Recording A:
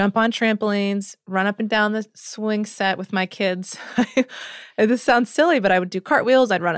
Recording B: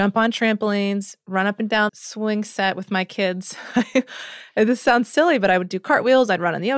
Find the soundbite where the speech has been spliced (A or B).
B